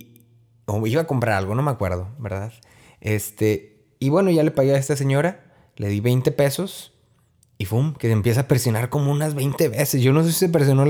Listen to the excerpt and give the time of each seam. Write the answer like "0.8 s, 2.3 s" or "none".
none